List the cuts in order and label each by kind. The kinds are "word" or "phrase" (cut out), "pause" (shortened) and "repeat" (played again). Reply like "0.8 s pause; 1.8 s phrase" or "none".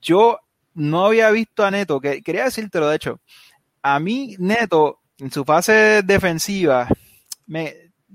none